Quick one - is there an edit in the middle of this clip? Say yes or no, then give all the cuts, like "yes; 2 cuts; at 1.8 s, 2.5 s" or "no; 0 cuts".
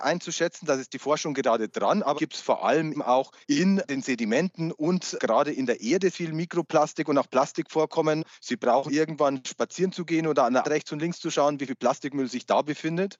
yes; 7 cuts; at 2.2 s, 2.9 s, 3.4 s, 6.1 s, 8.3 s, 8.9 s, 10.6 s